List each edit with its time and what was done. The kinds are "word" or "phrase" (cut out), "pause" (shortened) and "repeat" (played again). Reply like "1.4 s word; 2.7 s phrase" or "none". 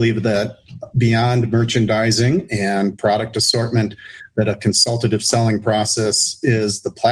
none